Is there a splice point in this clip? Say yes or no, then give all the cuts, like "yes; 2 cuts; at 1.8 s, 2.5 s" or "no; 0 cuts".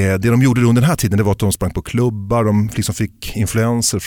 no; 0 cuts